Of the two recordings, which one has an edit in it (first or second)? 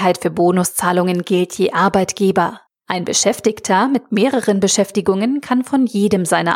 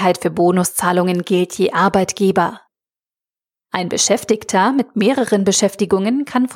first